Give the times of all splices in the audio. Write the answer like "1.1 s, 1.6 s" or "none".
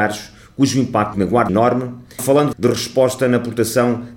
1.1 s, 1.5 s, 2.2 s, 2.5 s